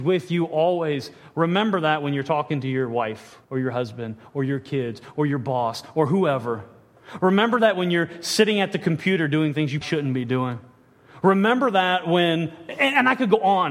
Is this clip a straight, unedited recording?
no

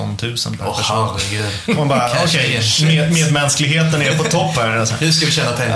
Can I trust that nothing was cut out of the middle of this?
yes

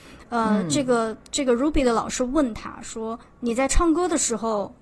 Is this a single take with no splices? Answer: no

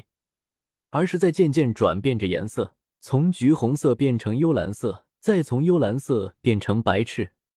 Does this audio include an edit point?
yes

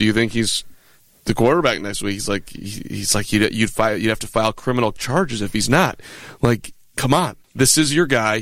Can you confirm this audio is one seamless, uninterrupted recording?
no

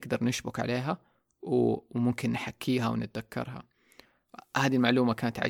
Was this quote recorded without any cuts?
yes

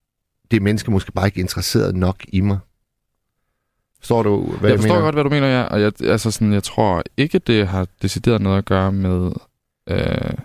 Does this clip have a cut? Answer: no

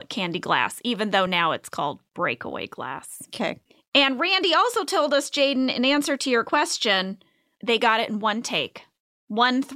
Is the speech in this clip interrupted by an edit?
no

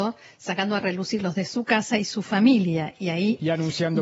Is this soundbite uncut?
no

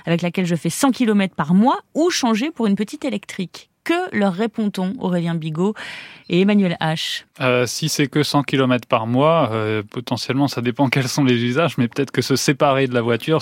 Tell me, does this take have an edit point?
yes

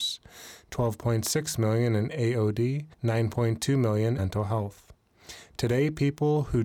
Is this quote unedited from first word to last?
no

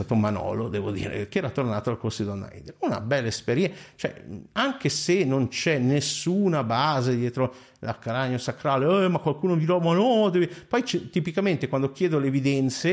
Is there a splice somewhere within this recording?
no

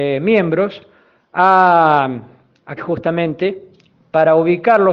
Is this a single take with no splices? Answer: no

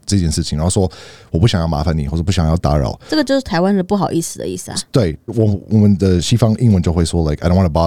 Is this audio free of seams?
no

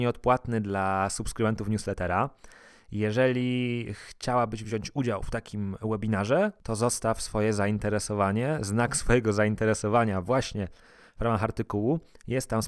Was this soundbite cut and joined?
no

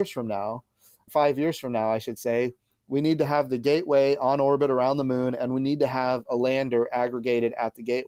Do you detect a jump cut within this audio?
no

